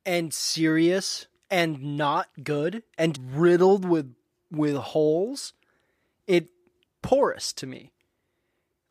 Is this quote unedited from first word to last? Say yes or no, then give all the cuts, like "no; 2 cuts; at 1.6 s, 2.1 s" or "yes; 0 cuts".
no; 3 cuts; at 1.4 s, 3.1 s, 6.9 s